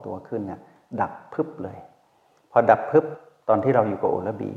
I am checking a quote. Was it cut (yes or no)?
no